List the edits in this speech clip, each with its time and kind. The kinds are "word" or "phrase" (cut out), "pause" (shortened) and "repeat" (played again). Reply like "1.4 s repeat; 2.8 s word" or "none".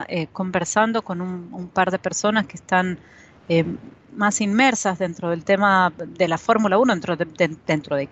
none